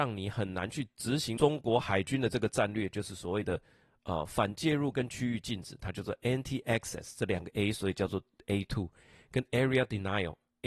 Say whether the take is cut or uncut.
uncut